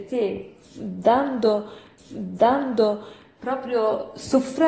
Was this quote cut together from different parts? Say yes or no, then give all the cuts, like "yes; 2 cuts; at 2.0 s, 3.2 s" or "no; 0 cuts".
yes; 1 cut; at 2.0 s